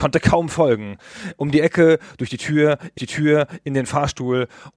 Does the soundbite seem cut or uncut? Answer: cut